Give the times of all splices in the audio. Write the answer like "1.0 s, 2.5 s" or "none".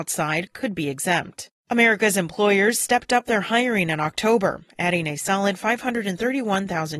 1.6 s